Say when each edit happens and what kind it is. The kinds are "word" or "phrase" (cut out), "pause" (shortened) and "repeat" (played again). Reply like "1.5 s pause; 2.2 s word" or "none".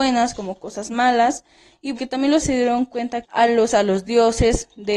1.9 s word; 2.4 s word; 3.2 s word; 3.7 s word